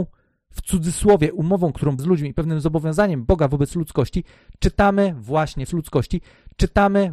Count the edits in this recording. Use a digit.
2